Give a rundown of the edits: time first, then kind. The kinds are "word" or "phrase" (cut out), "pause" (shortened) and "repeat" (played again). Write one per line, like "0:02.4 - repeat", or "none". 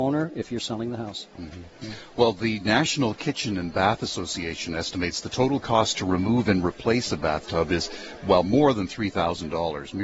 none